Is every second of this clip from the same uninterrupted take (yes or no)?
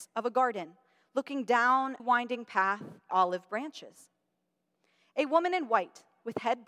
no